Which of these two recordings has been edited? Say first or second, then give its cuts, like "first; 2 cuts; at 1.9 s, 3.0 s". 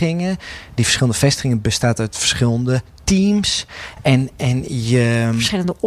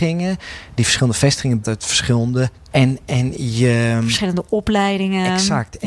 second; 2 cuts; at 1.6 s, 2.7 s